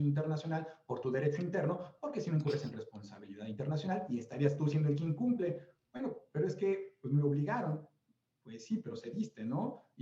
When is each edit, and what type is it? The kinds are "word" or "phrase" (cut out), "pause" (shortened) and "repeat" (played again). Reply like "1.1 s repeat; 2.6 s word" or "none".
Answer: none